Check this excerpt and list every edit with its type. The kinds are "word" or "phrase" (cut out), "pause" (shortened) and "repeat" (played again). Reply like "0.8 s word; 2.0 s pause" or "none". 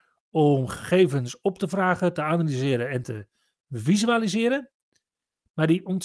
none